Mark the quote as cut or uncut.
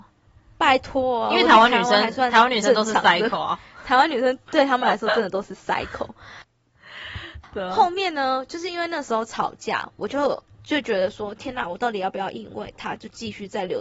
uncut